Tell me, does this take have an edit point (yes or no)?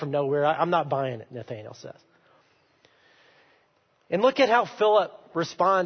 no